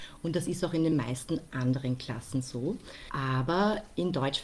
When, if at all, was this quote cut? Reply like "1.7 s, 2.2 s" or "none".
none